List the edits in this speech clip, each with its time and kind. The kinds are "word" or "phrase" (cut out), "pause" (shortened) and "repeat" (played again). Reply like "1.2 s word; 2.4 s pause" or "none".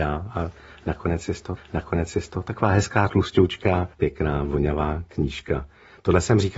1.6 s repeat; 3.9 s pause